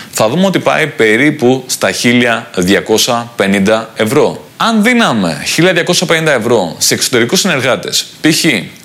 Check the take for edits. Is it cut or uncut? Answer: cut